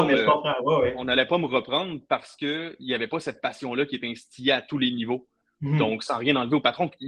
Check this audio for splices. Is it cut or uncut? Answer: uncut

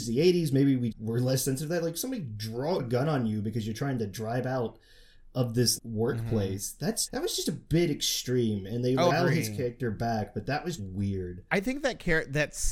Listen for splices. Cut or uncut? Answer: cut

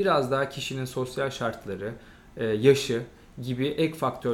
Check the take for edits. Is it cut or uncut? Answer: uncut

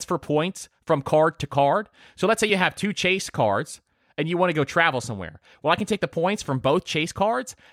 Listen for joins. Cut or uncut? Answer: uncut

